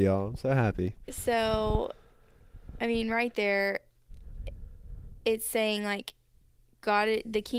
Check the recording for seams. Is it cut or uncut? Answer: uncut